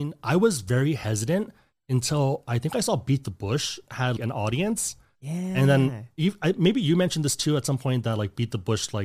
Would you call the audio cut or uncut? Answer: cut